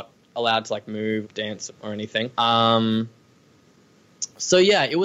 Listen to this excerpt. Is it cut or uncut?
cut